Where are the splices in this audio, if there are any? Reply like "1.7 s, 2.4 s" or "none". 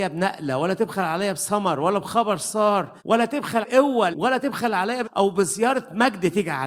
3.0 s, 3.6 s, 4.1 s, 5.0 s